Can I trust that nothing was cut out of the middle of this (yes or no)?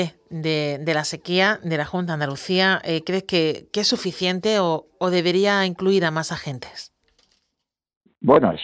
yes